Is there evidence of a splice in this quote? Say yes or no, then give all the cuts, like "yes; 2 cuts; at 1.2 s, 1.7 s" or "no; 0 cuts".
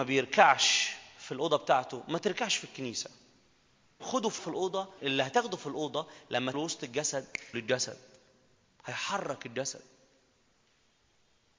yes; 5 cuts; at 4.0 s, 4.4 s, 5.0 s, 6.5 s, 7.5 s